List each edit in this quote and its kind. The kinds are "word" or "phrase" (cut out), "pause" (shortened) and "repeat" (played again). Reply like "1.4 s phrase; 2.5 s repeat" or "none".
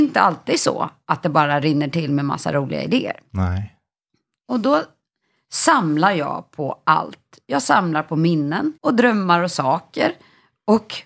8.8 s pause

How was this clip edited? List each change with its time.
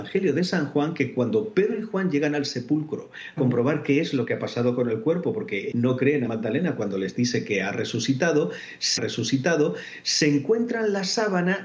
3.4 s word; 5.7 s word; 6.3 s phrase; 9.0 s repeat

